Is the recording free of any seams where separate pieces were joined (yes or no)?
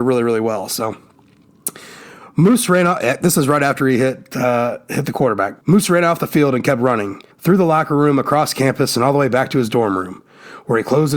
no